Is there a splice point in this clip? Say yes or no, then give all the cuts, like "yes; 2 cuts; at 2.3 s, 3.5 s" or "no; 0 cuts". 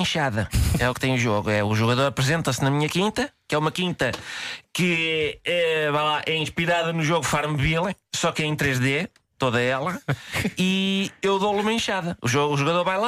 no; 0 cuts